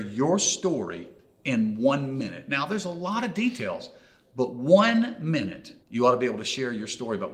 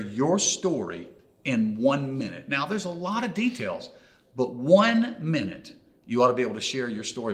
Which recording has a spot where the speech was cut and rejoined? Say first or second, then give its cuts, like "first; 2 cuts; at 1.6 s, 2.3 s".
first; 1 cut; at 5.8 s